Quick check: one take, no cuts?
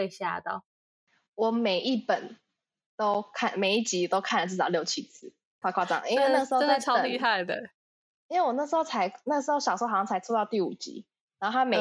no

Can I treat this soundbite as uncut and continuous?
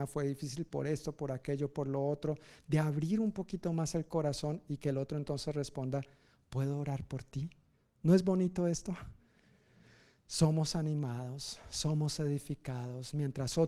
yes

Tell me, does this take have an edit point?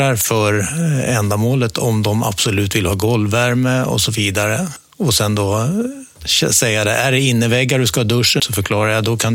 yes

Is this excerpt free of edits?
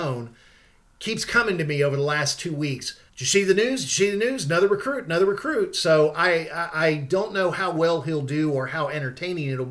no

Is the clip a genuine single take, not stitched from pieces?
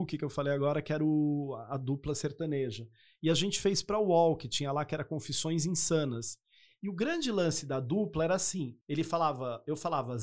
no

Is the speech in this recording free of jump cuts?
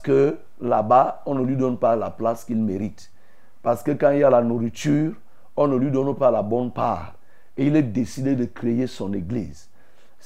yes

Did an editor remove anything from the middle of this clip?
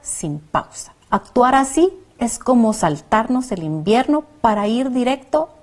yes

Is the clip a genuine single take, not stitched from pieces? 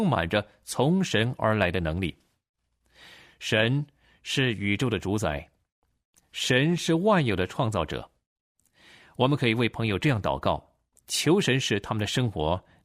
yes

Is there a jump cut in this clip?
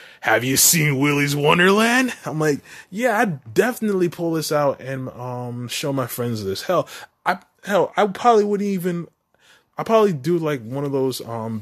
no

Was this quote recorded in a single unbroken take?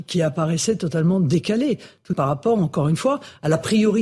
no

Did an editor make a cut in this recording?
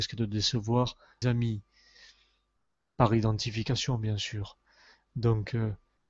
yes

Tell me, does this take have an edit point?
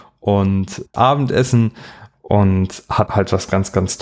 yes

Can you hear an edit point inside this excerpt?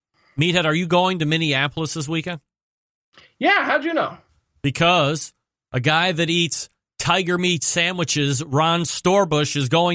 no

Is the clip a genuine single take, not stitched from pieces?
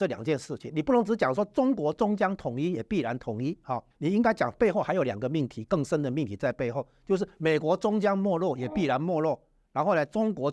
no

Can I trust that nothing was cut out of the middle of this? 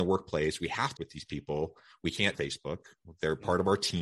no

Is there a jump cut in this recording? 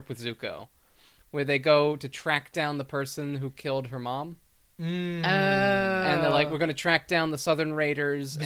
no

